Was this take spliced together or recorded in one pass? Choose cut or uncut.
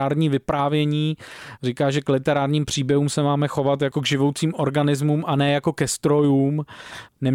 uncut